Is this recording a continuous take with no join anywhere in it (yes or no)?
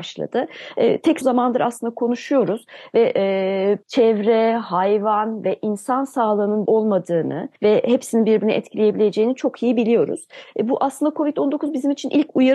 no